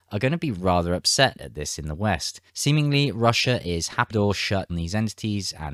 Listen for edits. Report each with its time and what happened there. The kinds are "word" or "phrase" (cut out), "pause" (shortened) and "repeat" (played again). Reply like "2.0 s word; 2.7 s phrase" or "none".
2.5 s pause; 4.1 s phrase; 4.7 s word